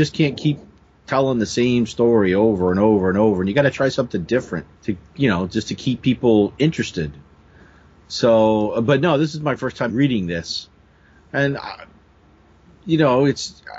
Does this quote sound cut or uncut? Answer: cut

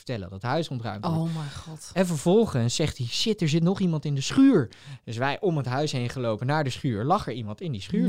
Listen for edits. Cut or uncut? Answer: uncut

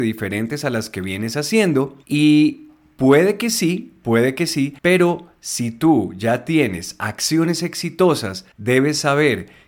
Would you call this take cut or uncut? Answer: cut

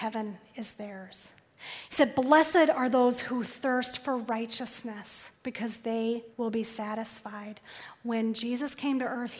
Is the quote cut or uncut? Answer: cut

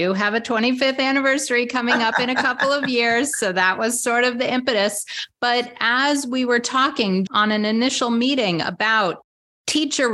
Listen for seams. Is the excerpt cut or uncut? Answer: cut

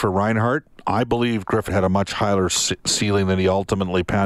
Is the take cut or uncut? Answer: cut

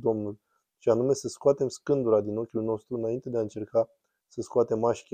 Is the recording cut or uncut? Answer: uncut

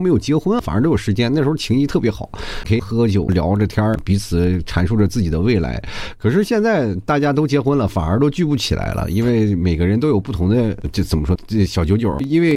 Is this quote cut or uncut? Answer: cut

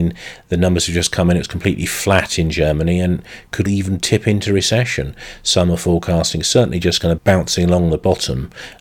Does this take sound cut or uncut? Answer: cut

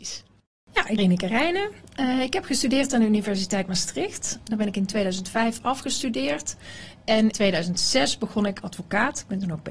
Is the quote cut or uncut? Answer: cut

